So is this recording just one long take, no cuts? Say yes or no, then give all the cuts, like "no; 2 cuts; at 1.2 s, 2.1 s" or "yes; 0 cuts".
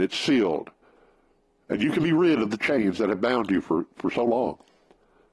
yes; 0 cuts